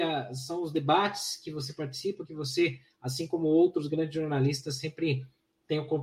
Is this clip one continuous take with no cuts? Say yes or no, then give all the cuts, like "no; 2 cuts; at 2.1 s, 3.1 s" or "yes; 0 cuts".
yes; 0 cuts